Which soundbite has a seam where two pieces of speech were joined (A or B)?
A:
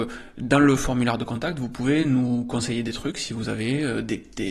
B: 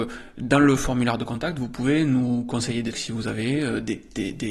B